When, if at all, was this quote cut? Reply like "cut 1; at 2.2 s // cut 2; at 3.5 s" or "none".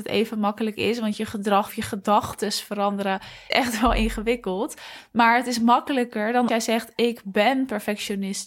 cut 1; at 1.7 s // cut 2; at 3.5 s // cut 3; at 6.5 s